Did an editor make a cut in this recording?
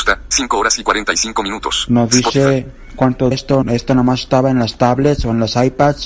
yes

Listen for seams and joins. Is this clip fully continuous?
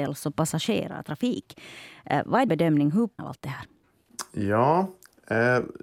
no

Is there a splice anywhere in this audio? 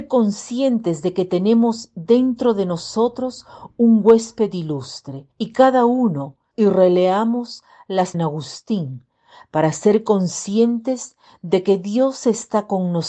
yes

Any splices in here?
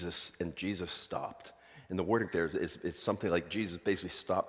yes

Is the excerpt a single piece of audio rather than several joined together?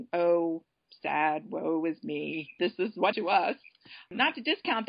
no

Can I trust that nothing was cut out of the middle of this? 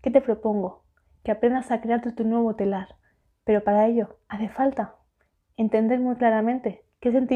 yes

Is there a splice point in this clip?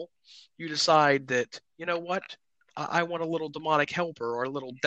no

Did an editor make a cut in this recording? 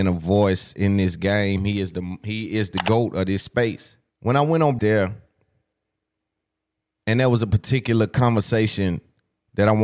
yes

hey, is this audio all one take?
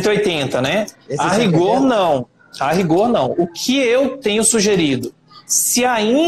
yes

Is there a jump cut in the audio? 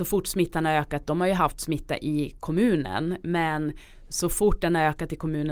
no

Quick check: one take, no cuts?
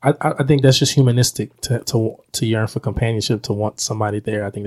yes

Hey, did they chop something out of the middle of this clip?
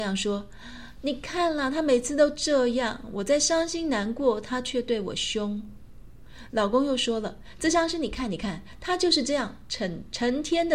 no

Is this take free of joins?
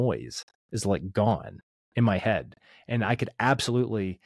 yes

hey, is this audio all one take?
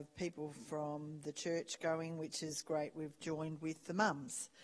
yes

